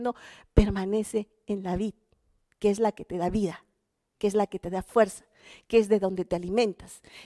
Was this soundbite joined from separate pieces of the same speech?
no; 0 cuts

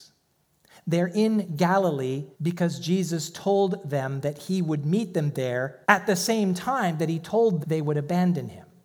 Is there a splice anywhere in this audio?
yes; 3 cuts; at 2.3 s, 5.8 s, 7.6 s

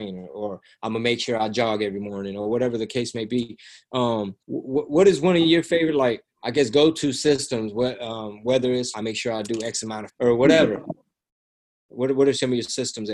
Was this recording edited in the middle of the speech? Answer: yes; 4 cuts; at 4.4 s, 6.3 s, 8.9 s, 10.1 s

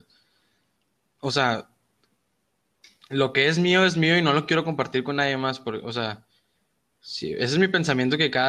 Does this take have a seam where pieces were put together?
no; 0 cuts

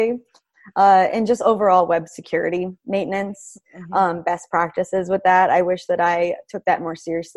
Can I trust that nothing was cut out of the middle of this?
yes; 0 cuts

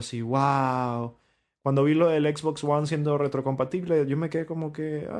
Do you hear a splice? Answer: no; 0 cuts

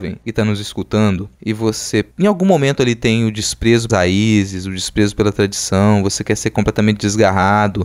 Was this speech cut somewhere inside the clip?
yes; 2 cuts; at 2.1 s, 3.9 s

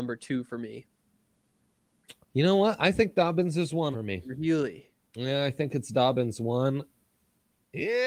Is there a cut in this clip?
yes; 2 cuts; at 2.2 s, 3.9 s

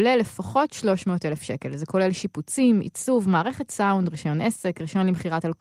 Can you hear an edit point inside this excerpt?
no; 0 cuts

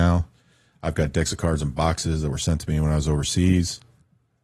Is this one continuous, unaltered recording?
yes; 0 cuts

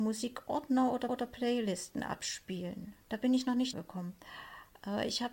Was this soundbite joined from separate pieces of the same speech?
yes; 3 cuts; at 1.1 s, 3.0 s, 3.7 s

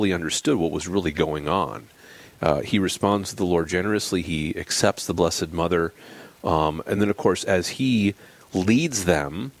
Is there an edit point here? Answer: no; 0 cuts

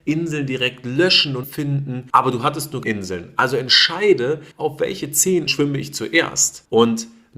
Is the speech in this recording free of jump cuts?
no; 4 cuts; at 1.4 s, 2.8 s, 4.5 s, 5.5 s

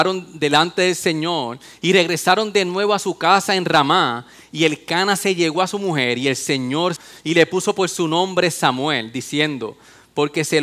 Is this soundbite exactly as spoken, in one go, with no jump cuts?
yes; 0 cuts

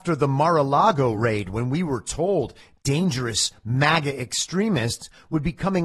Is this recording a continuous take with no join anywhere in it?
yes; 0 cuts

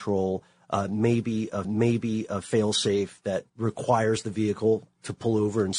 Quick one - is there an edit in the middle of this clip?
yes; 2 cuts; at 1.6 s, 3.5 s

